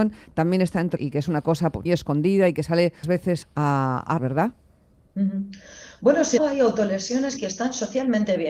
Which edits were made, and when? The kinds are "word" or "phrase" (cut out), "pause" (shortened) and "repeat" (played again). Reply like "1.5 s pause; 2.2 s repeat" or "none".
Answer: 1.0 s word; 1.9 s word; 3.0 s word; 3.4 s word; 4.2 s word; 6.4 s word; 7.4 s word